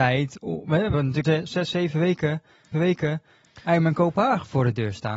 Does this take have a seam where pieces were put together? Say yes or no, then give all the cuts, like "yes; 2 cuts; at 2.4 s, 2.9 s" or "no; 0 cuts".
yes; 3 cuts; at 0.9 s, 1.2 s, 2.7 s